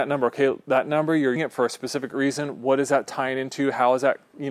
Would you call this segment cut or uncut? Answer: cut